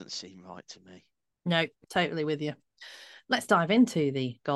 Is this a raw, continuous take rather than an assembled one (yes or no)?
yes